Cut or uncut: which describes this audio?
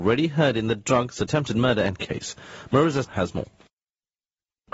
cut